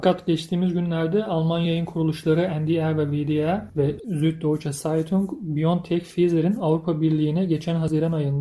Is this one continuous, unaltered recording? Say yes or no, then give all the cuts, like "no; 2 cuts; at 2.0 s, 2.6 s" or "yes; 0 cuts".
yes; 0 cuts